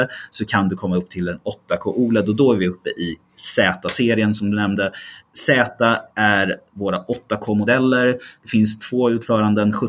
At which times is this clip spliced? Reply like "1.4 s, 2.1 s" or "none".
none